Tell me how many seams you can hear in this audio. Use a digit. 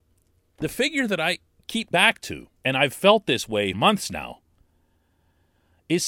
3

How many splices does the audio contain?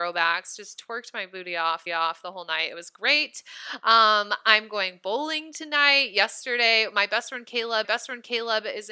2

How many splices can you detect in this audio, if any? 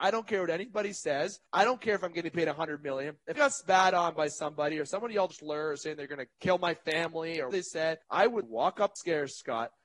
8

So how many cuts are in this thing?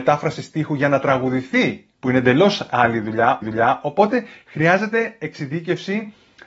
2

